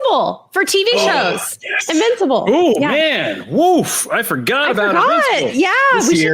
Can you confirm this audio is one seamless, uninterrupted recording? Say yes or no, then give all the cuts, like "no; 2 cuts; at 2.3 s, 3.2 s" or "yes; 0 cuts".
yes; 0 cuts